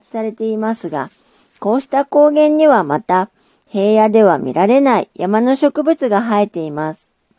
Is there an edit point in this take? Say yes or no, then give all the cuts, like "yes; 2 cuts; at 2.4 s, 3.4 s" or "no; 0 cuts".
no; 0 cuts